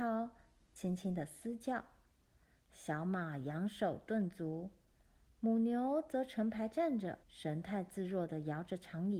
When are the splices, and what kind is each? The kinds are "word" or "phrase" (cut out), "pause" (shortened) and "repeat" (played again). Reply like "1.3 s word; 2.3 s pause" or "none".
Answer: 7.2 s pause